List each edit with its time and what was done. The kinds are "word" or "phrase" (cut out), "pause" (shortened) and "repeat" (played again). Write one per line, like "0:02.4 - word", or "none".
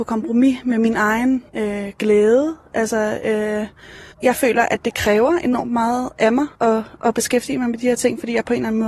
0:01.5 - pause
0:04.1 - pause
0:06.5 - pause